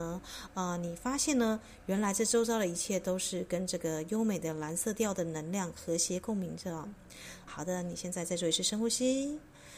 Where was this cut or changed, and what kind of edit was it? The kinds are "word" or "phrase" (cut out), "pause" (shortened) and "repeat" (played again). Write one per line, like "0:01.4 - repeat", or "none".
0:07.5 - word

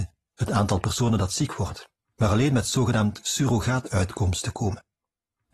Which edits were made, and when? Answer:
none

